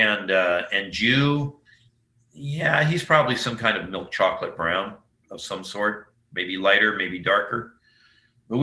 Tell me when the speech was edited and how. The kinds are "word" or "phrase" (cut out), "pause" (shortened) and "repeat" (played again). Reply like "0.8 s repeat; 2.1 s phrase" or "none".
none